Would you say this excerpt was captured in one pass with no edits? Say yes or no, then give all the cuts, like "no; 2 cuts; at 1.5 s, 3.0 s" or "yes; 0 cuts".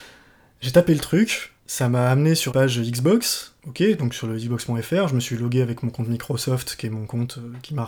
no; 3 cuts; at 1.6 s, 2.5 s, 3.6 s